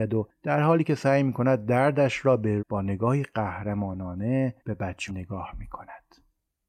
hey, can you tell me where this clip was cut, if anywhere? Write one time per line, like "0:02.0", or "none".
0:02.6
0:04.6
0:05.1

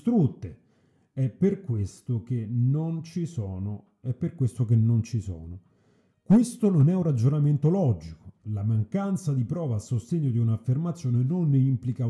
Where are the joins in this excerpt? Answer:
none

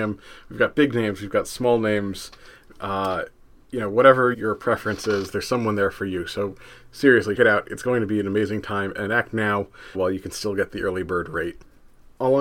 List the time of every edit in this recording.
0:04.3
0:07.4
0:09.9

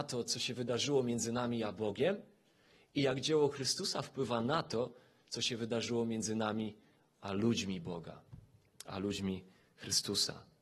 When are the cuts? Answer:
none

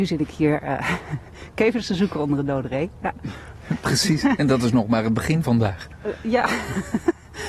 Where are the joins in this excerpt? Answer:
0:05.4

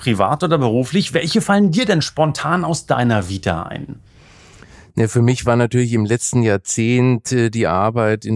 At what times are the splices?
none

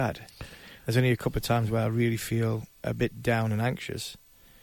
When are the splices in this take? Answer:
0:02.7

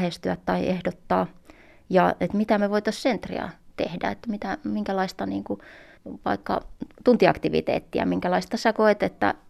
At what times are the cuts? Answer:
none

